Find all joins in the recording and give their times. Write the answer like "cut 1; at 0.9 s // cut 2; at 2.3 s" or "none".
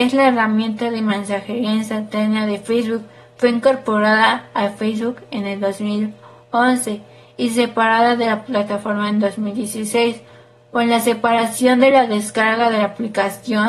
none